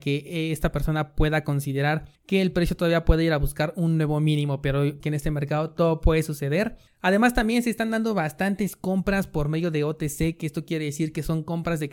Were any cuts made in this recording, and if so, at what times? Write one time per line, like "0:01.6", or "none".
0:02.1
0:05.0
0:06.9